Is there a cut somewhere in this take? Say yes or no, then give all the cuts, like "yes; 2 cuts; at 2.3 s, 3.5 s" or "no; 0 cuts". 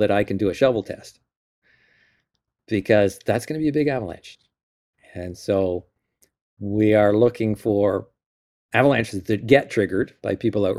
no; 0 cuts